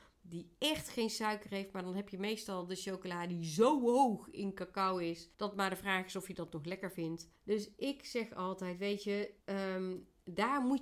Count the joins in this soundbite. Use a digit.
3